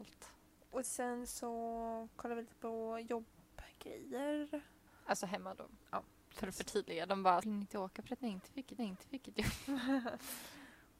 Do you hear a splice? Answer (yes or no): yes